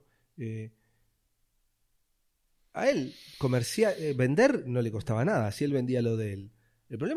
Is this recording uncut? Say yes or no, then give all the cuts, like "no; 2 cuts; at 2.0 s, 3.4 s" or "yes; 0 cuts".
yes; 0 cuts